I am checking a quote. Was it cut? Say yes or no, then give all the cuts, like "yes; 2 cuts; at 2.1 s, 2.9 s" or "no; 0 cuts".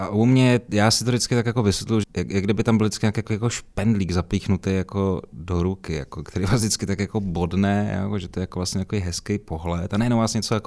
yes; 1 cut; at 2.0 s